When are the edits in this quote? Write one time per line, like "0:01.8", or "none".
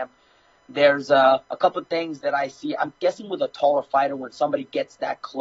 0:01.4